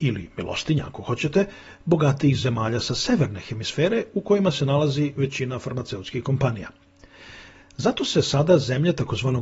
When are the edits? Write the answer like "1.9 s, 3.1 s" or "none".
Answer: none